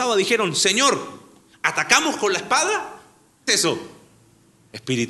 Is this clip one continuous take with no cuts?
no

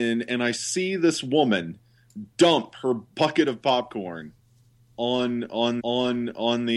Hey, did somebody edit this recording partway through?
yes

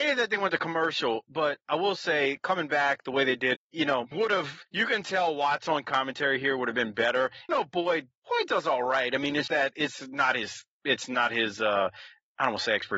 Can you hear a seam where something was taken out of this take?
yes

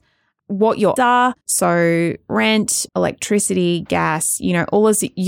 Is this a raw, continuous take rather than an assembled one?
no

